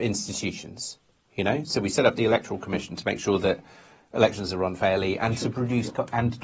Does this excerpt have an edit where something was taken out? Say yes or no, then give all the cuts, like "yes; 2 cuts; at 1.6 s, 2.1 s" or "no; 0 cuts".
no; 0 cuts